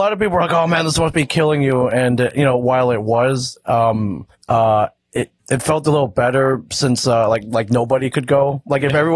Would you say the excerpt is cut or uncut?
cut